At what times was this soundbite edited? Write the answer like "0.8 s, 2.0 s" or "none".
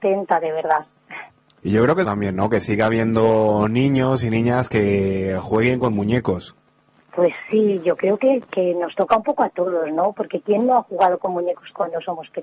2.0 s